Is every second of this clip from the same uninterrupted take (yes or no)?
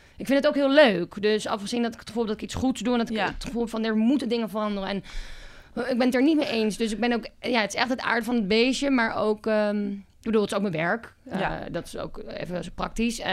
yes